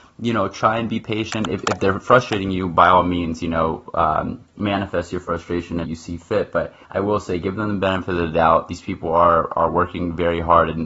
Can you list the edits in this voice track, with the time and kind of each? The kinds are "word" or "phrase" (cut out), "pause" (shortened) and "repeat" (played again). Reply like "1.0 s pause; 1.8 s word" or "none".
5.8 s phrase; 6.8 s pause